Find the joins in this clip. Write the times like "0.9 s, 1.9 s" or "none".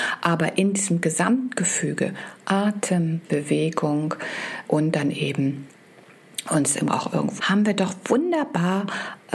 3.2 s, 4.6 s, 6.9 s, 7.4 s

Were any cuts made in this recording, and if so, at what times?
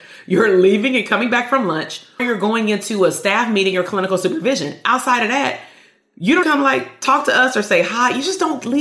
2.2 s, 6.4 s

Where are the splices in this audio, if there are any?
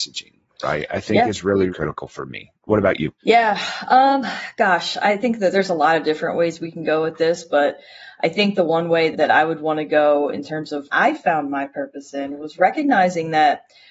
1.7 s, 3.2 s, 9.1 s, 10.9 s

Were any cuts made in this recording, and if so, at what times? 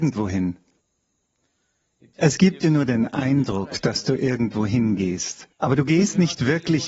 none

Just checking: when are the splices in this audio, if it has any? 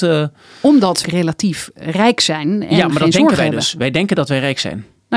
1.0 s

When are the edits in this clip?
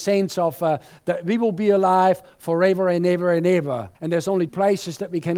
3.9 s, 4.5 s

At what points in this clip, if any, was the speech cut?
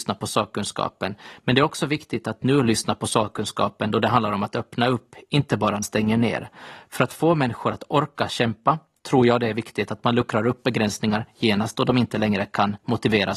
5.8 s

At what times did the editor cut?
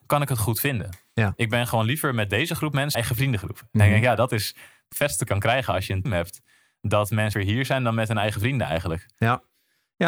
2.9 s, 4.9 s, 5.3 s, 6.1 s, 7.3 s

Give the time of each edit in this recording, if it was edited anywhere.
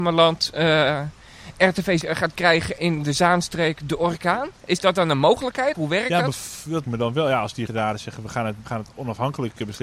2.0 s, 2.8 s, 5.7 s, 6.8 s, 7.7 s, 8.6 s

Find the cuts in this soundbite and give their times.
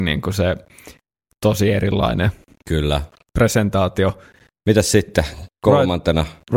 none

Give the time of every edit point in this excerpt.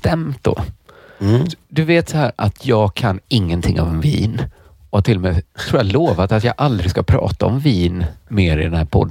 none

